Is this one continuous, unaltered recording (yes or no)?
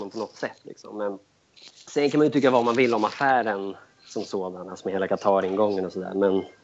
yes